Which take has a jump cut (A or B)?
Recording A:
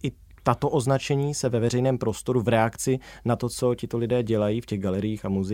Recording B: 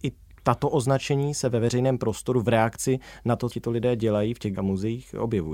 B